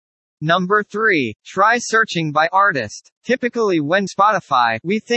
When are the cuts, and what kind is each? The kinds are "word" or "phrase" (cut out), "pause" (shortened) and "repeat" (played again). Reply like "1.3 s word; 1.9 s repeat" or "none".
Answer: 3.1 s pause; 4.1 s word